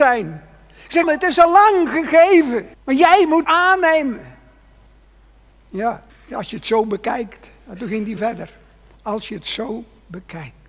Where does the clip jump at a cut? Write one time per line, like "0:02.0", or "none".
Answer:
0:01.0
0:02.7
0:03.4
0:06.1
0:08.2